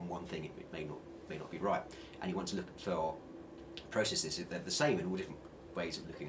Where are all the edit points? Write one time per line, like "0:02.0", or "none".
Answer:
none

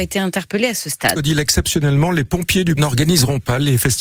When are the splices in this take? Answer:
0:01.2
0:02.8

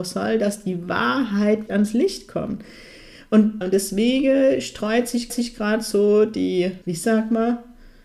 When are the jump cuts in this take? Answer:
0:01.7
0:03.6
0:05.3
0:06.8

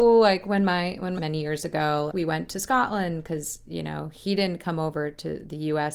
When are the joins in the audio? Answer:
0:01.2
0:02.1

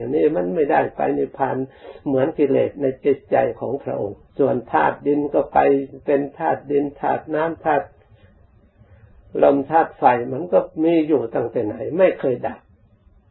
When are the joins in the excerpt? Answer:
0:04.3

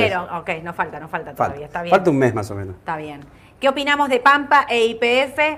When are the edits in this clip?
none

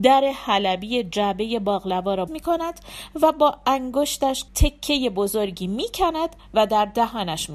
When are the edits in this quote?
0:02.3
0:04.5

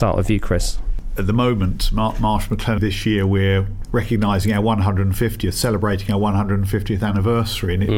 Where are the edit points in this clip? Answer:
0:02.8

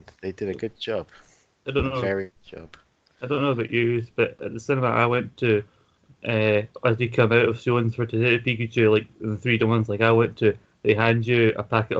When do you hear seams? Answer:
0:02.4

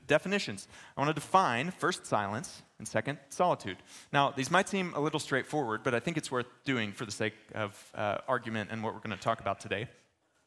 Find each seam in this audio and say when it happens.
none

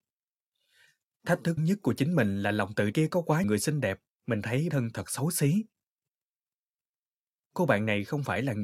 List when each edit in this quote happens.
0:01.6
0:02.9
0:03.4
0:04.1
0:04.7

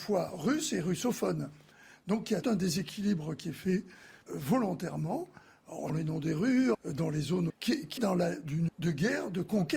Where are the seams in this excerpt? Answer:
0:02.4
0:04.3
0:05.9
0:06.7
0:07.5
0:08.0
0:08.7

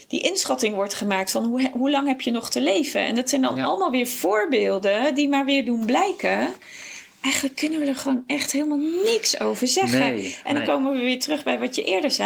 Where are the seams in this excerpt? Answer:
none

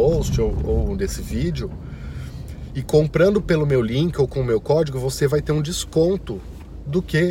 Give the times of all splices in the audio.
none

